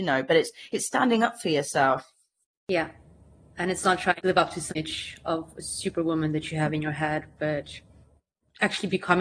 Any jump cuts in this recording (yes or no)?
no